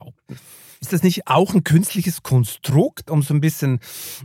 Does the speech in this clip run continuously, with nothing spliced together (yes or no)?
yes